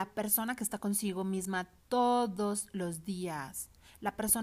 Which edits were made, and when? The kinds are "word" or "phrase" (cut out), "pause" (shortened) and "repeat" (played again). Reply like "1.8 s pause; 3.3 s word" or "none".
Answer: none